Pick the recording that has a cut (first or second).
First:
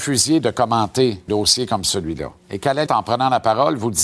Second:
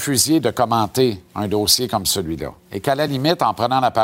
first